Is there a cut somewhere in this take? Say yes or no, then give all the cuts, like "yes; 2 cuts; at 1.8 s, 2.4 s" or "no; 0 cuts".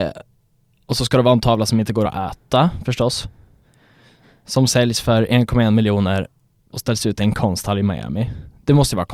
no; 0 cuts